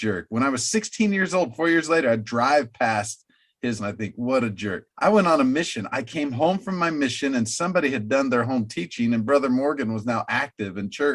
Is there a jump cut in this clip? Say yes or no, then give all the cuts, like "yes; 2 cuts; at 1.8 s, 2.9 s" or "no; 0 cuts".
yes; 2 cuts; at 3.8 s, 4.9 s